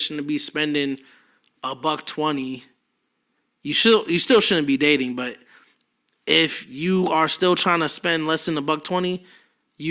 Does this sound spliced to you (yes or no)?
no